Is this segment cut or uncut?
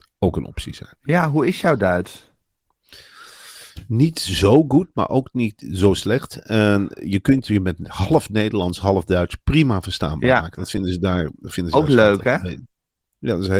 uncut